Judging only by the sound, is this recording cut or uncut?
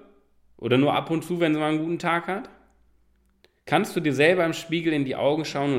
uncut